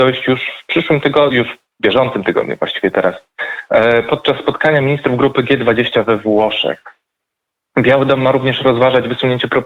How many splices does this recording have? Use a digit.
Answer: 0